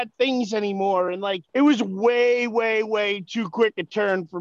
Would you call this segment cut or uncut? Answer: cut